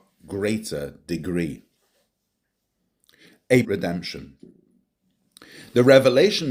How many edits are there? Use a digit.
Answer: 1